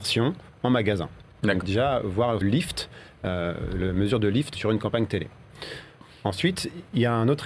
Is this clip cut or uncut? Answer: cut